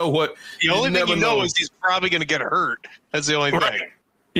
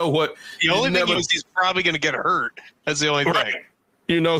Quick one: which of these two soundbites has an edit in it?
second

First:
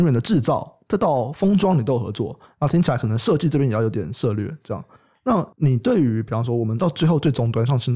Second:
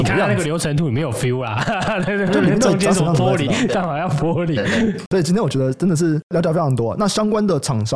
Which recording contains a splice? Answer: second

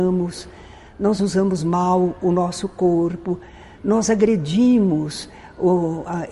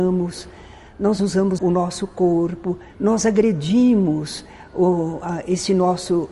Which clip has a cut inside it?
second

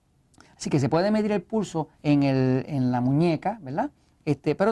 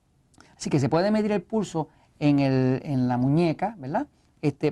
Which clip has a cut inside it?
first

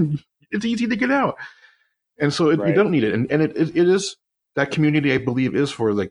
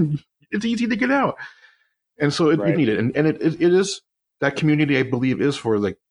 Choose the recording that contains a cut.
second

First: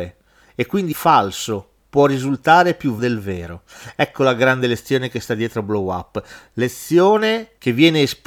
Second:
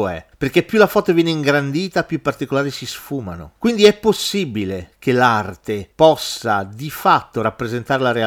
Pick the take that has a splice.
first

